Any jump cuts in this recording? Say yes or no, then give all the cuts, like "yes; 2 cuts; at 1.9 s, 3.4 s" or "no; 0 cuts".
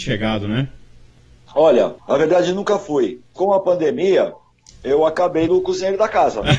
yes; 3 cuts; at 2.0 s, 3.4 s, 5.5 s